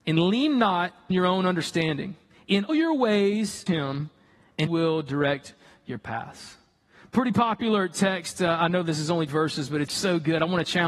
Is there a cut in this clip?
yes; 6 cuts; at 1.1 s, 2.7 s, 3.7 s, 4.7 s, 9.3 s, 9.9 s

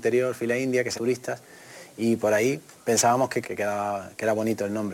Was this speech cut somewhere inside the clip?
yes; 3 cuts; at 1.0 s, 2.7 s, 3.4 s

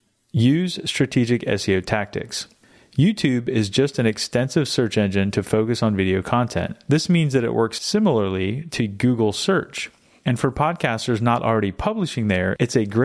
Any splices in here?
no; 0 cuts

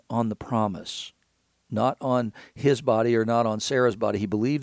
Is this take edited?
no; 0 cuts

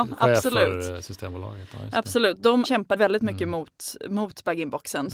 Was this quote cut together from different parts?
yes; 2 cuts; at 2.6 s, 3.0 s

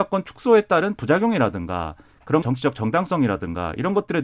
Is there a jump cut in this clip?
yes; 1 cut; at 2.4 s

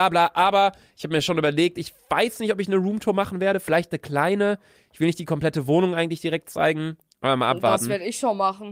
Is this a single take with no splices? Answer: yes; 0 cuts

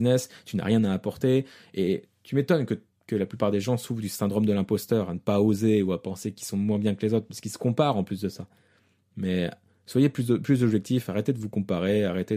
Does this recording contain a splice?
no; 0 cuts

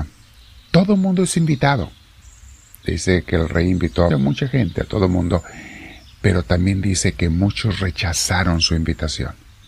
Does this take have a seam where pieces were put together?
yes; 1 cut; at 4.1 s

